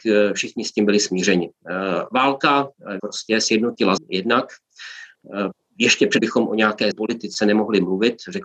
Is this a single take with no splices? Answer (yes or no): no